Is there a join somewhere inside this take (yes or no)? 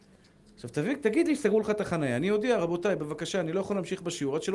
no